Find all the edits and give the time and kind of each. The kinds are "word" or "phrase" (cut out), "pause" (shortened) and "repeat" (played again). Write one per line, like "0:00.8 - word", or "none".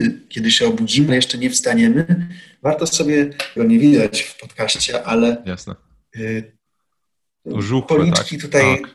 0:01.1 - word
0:03.6 - phrase